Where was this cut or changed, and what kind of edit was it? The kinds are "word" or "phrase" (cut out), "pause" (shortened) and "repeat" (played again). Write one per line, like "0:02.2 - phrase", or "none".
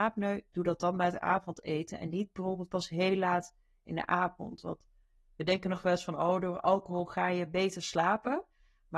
none

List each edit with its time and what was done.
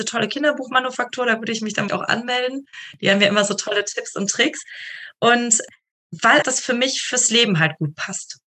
0:01.9 - word
0:06.4 - word

